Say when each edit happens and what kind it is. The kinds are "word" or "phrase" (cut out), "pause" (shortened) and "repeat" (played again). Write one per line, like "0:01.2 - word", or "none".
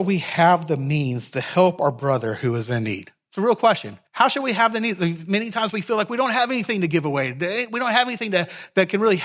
0:04.1 - pause